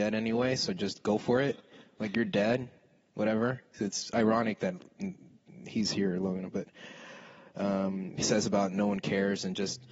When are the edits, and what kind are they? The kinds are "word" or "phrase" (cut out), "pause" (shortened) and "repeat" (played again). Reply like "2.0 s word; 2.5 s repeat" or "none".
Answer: 8.2 s word